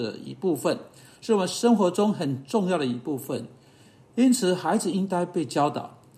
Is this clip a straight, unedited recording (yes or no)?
yes